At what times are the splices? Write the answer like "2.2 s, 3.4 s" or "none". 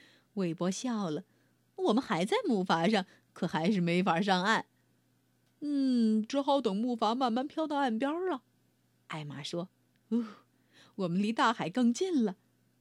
none